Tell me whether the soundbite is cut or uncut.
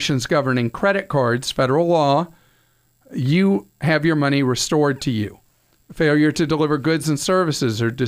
uncut